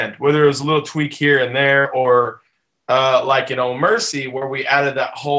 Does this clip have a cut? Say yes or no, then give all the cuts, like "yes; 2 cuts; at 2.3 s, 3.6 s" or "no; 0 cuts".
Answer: no; 0 cuts